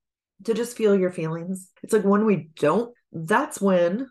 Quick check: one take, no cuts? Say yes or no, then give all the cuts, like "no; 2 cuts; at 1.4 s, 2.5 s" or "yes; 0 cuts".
no; 2 cuts; at 1.8 s, 3.0 s